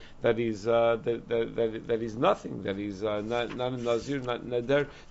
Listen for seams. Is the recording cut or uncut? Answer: uncut